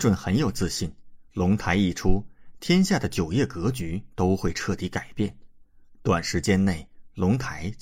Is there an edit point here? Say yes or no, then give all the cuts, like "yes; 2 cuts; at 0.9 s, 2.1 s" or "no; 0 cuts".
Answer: yes; 1 cut; at 1.3 s